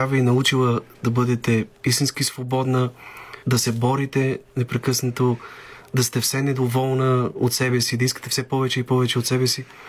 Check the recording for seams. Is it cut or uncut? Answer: cut